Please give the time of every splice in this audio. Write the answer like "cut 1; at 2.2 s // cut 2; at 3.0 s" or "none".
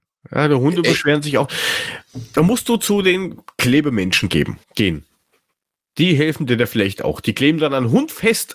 cut 1; at 4.6 s